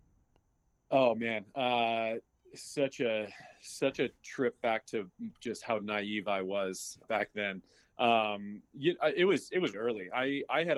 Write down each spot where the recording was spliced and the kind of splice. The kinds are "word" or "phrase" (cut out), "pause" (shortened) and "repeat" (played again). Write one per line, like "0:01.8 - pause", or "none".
0:07.0 - word
0:09.7 - word